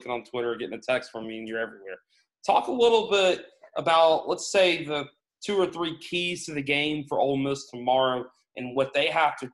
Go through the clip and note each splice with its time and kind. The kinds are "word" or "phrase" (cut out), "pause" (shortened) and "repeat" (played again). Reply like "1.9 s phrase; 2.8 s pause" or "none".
none